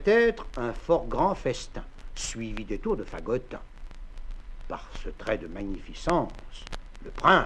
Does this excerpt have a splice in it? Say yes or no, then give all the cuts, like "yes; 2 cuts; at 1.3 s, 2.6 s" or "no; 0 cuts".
no; 0 cuts